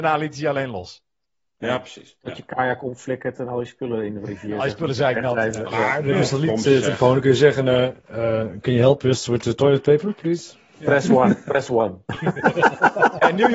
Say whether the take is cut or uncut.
uncut